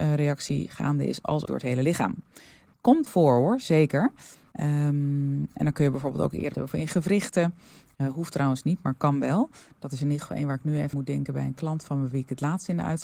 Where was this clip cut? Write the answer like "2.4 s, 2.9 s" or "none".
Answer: 1.4 s, 3.1 s, 6.5 s, 10.9 s